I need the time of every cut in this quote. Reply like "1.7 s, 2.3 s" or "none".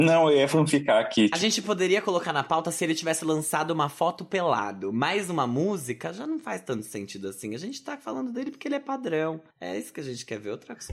9.5 s